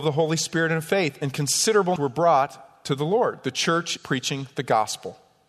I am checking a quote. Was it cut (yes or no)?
yes